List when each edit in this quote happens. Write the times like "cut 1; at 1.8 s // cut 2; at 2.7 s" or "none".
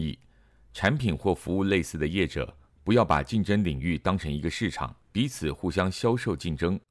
cut 1; at 5.0 s